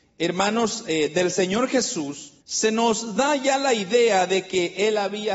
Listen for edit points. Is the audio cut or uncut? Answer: cut